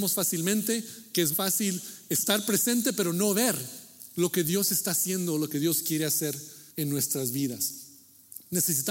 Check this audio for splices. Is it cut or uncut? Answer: cut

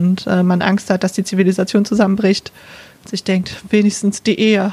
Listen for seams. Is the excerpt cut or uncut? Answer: uncut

